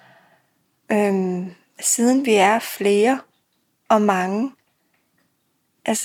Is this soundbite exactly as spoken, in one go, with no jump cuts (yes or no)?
yes